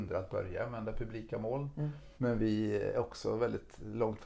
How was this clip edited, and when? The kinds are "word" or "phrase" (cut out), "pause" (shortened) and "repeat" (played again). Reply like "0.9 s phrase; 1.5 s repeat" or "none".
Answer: 2.2 s pause